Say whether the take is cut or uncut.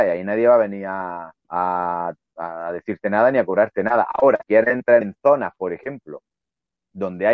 cut